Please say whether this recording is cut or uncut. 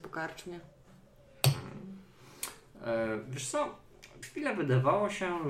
cut